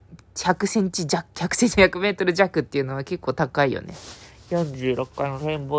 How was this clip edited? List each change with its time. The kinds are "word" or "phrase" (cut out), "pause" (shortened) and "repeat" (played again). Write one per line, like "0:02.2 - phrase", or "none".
none